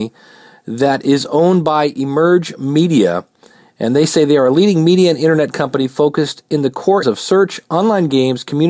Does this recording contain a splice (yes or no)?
yes